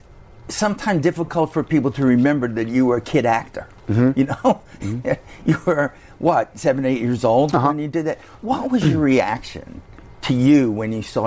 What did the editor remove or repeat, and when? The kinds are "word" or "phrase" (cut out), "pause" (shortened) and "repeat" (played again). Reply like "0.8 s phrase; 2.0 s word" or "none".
none